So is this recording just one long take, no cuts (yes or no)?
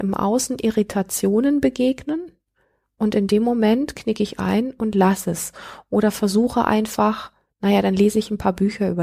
yes